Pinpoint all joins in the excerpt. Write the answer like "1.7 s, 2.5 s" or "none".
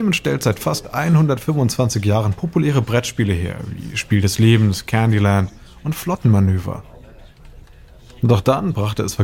none